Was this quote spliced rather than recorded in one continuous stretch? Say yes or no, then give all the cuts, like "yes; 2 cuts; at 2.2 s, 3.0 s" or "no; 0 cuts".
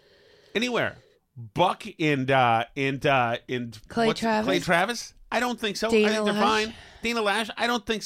yes; 1 cut; at 3.9 s